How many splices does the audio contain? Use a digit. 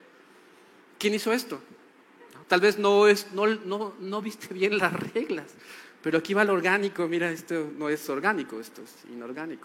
1